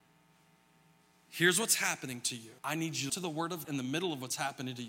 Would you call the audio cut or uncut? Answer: cut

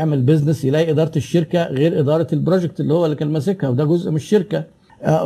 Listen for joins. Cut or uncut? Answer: uncut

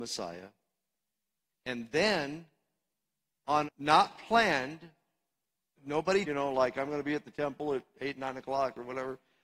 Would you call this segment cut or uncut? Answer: cut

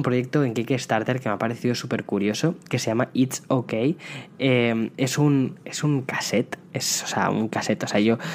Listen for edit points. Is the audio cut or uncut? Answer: uncut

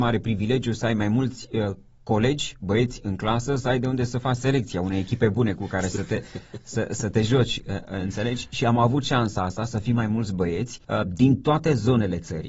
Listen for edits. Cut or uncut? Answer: cut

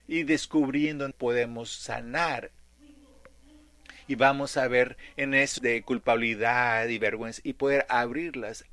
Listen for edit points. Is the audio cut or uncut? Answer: cut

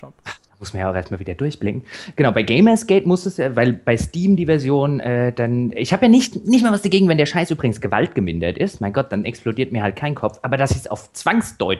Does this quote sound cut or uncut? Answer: uncut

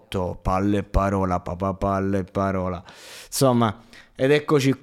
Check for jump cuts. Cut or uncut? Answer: uncut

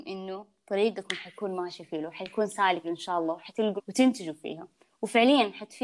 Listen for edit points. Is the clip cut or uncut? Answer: cut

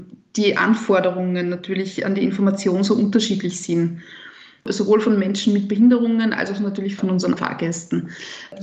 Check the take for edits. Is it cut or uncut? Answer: cut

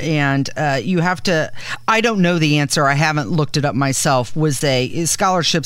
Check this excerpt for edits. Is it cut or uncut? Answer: cut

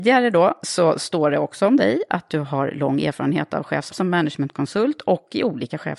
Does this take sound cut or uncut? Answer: cut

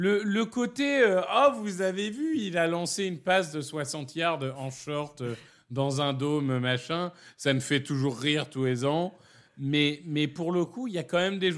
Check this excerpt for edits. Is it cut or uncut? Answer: uncut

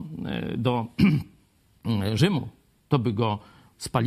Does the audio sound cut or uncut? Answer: uncut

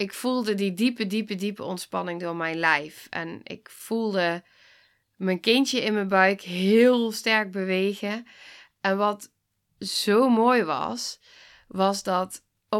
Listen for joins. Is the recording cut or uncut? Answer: uncut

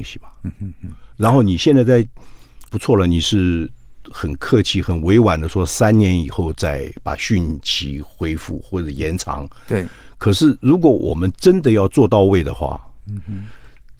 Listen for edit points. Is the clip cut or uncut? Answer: cut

